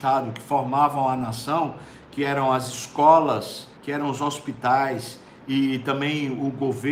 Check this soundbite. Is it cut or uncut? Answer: cut